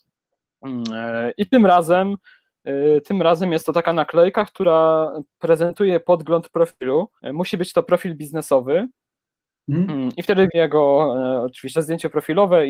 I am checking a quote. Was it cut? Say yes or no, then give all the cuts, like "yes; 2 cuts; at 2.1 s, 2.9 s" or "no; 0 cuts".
yes; 3 cuts; at 7.2 s, 10.5 s, 11.7 s